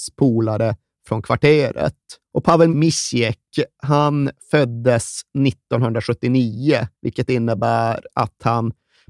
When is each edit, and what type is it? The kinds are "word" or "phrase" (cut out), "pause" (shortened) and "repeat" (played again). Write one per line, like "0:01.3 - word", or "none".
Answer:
0:02.2 - pause
0:02.7 - word
0:06.9 - pause